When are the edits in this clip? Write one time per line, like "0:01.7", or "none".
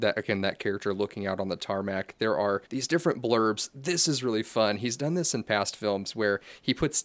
0:02.7